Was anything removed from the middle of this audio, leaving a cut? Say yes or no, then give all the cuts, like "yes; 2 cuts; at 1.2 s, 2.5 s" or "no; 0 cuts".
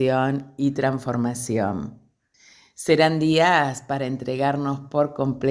no; 0 cuts